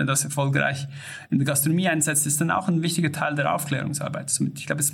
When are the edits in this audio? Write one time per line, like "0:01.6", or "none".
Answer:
none